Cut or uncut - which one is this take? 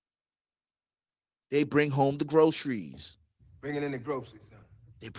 uncut